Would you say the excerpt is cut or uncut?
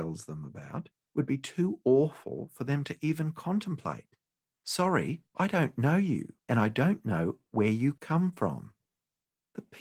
cut